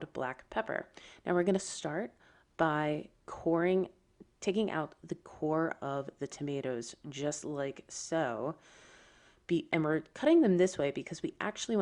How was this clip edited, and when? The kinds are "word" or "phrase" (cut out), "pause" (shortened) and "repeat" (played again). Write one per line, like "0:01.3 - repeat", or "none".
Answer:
none